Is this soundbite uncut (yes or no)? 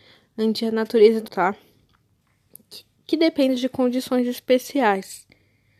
no